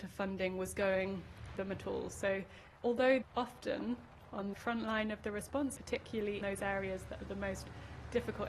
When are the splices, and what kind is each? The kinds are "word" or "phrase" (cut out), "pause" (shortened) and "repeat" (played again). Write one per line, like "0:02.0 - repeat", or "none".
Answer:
0:01.6 - word
0:03.2 - word
0:04.5 - word
0:05.8 - word
0:06.4 - word